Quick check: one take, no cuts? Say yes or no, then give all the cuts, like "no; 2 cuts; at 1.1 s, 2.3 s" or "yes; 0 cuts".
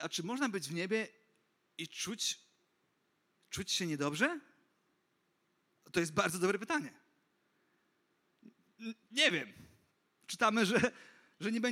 yes; 0 cuts